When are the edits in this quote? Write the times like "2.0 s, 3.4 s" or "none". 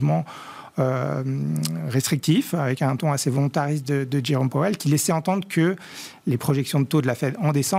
none